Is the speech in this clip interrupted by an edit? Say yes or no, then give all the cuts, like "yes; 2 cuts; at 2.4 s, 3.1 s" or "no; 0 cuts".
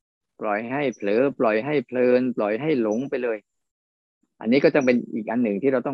no; 0 cuts